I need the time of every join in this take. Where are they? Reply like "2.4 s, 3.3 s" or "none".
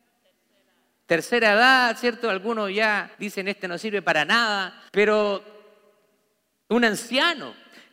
3.1 s, 4.9 s